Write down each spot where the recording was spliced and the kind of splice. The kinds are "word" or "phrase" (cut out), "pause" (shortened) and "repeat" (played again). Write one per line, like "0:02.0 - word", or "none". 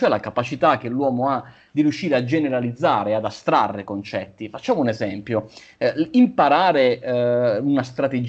none